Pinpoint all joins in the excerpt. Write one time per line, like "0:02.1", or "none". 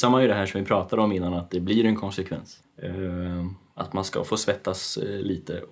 0:02.6